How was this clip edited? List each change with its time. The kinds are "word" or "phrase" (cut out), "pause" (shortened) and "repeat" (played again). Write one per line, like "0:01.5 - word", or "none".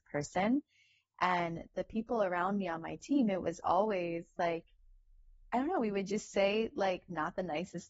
none